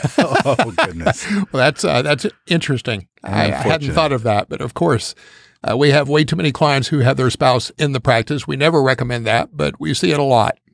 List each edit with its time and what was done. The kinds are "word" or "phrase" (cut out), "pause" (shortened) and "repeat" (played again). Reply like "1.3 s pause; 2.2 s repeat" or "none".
none